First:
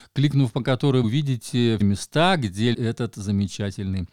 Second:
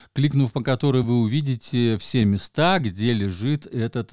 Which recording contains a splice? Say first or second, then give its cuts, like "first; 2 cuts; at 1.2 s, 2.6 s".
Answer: first; 3 cuts; at 1.0 s, 1.8 s, 2.7 s